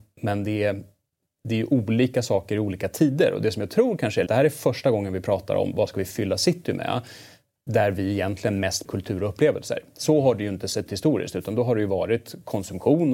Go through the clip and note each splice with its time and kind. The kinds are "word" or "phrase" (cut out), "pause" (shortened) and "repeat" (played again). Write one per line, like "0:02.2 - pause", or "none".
0:04.3 - phrase
0:08.9 - word
0:10.9 - word